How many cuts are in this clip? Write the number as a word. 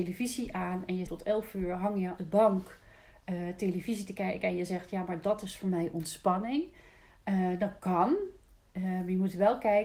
two